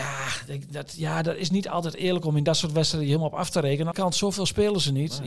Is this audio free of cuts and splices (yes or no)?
no